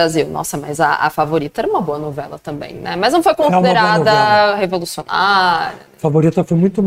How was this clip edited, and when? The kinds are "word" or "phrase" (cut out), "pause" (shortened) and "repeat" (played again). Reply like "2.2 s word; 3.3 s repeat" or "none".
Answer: none

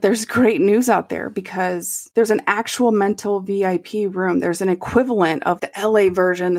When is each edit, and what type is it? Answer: 5.6 s word

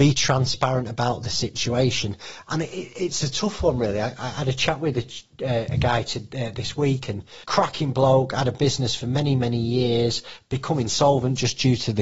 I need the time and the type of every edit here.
7.4 s pause

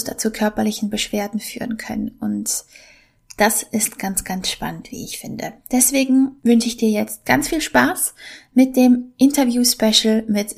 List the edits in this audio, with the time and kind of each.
none

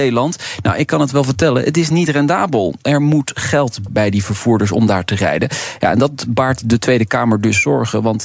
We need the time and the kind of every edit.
3.9 s word

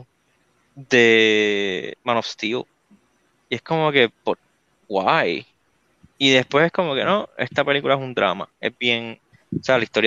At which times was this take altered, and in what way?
4.1 s pause

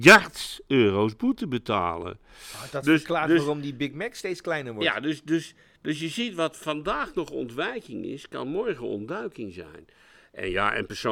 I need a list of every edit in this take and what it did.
none

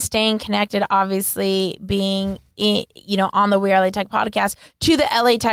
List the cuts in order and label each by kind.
none

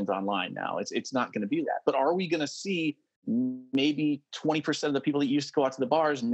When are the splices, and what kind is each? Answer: 1.6 s word

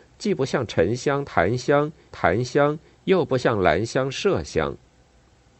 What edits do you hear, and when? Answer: 2.1 s repeat

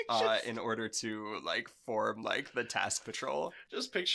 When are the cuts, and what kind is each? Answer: 3.0 s phrase

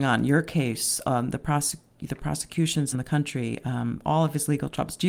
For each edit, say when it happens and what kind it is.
2.9 s phrase

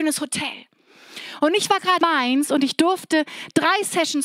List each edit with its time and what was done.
2.0 s word

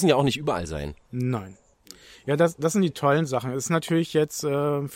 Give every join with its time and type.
none

